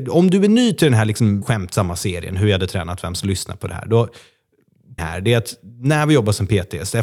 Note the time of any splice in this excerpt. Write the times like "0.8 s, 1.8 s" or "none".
1.4 s, 3.2 s, 5.0 s